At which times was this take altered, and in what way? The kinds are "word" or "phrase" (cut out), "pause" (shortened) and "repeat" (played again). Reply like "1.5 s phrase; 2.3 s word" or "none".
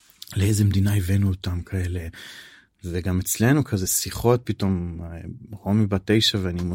none